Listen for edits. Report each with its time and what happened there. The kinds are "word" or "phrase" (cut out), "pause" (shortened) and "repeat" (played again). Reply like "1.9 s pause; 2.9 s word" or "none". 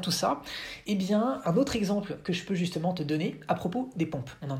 1.4 s word